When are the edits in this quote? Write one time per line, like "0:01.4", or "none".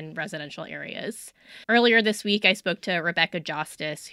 0:01.6